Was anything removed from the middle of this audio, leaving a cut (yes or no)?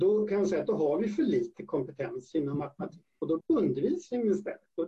yes